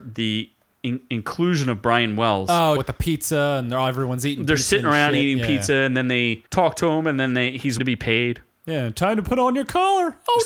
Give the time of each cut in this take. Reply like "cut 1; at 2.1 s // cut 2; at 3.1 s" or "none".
cut 1; at 2.8 s // cut 2; at 6.5 s // cut 3; at 7.8 s